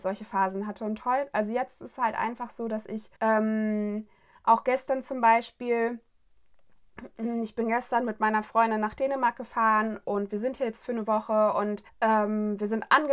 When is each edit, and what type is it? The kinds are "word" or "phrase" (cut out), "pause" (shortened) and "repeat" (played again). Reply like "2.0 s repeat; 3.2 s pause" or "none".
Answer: 3.2 s pause; 11.9 s pause